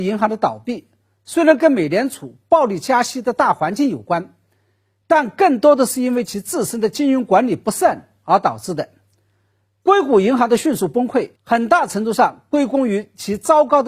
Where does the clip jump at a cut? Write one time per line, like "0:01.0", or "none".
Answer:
0:11.3